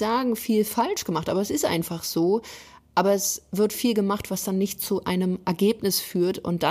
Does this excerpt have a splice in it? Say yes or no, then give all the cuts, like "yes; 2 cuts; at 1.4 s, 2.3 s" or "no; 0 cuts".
no; 0 cuts